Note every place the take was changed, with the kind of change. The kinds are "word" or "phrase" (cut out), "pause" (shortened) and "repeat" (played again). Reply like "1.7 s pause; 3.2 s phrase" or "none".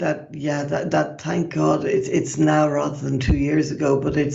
none